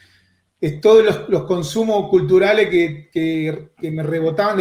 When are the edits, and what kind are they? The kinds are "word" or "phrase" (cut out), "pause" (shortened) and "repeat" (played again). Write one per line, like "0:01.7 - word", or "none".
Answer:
none